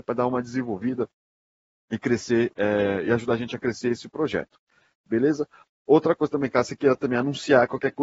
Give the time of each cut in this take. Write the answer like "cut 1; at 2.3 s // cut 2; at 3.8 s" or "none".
none